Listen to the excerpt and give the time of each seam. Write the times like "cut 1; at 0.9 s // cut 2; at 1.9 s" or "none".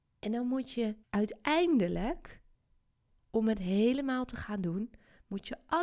cut 1; at 1.0 s